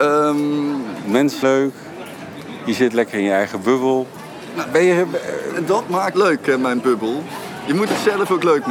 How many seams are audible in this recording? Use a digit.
3